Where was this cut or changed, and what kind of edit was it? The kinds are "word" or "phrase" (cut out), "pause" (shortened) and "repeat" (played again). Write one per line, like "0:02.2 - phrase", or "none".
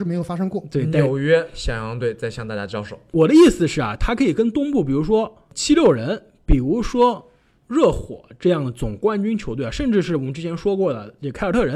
none